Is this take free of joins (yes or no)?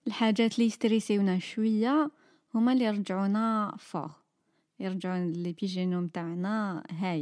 yes